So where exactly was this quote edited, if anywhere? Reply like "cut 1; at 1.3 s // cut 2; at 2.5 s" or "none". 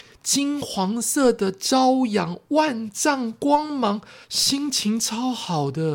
cut 1; at 4.2 s